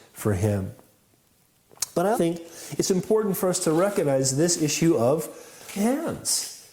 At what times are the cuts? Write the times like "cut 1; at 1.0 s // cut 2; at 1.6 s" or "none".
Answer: cut 1; at 2.1 s // cut 2; at 5.8 s